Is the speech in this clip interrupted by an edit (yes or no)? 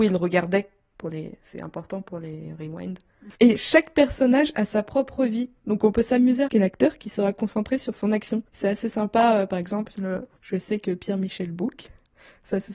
yes